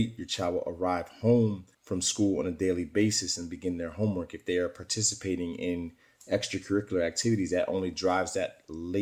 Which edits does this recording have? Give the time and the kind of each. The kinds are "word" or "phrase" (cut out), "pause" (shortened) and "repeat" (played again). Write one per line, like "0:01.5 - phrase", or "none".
0:01.7 - pause

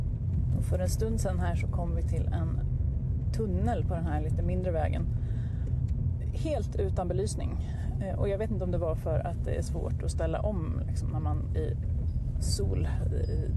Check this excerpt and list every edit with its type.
0:11.5 - word

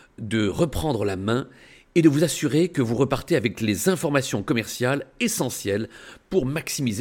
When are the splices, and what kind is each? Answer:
none

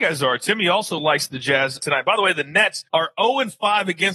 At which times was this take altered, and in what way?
0:01.8 - word
0:02.9 - pause

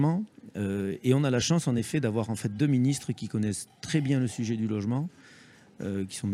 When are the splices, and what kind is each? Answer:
none

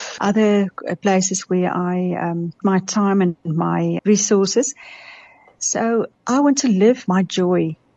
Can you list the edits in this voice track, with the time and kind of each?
0:02.6 - word
0:04.0 - word

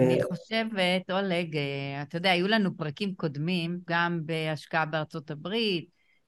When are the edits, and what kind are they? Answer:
0:03.9 - word

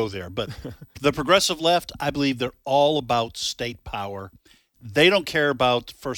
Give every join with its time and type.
none

